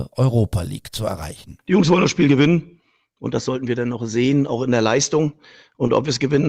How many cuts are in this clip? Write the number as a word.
zero